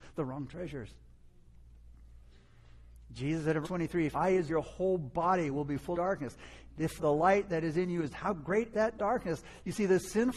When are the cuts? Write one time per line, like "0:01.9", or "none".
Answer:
0:03.6
0:04.1
0:04.5
0:05.9
0:07.0
0:08.1
0:08.7